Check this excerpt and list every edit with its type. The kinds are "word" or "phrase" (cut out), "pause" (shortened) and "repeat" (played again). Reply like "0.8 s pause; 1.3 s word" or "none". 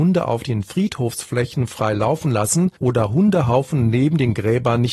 2.8 s pause